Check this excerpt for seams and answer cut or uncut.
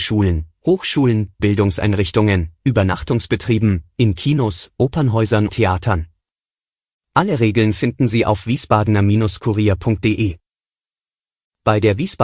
cut